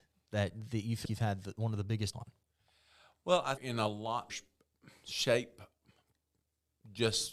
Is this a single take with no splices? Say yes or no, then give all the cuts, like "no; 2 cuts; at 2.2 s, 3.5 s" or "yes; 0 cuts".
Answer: no; 4 cuts; at 1.0 s, 2.1 s, 3.6 s, 4.3 s